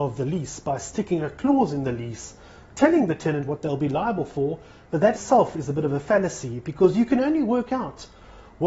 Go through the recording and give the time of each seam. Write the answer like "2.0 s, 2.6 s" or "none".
5.1 s